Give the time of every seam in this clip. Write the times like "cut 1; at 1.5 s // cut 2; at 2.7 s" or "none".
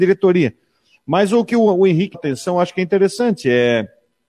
cut 1; at 2.1 s